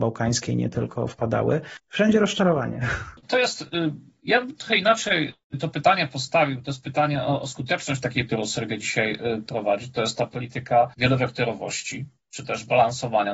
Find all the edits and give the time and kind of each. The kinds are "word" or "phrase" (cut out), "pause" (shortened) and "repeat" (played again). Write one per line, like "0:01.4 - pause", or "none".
0:08.3 - word